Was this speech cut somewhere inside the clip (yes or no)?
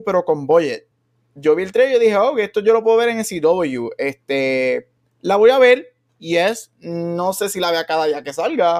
no